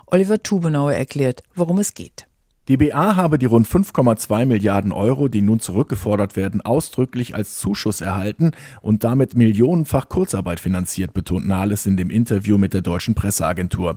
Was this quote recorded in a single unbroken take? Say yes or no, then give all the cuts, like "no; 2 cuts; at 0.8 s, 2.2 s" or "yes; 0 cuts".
yes; 0 cuts